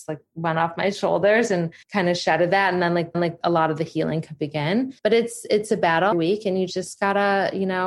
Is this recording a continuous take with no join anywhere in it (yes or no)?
no